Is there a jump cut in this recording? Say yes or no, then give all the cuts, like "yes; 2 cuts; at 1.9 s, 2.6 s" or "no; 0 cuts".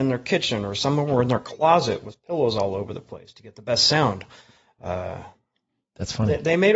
no; 0 cuts